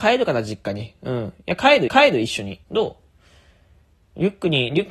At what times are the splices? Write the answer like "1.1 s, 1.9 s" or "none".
1.9 s, 2.6 s